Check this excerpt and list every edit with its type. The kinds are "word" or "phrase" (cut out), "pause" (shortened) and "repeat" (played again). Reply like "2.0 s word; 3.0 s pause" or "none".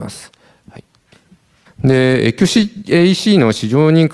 none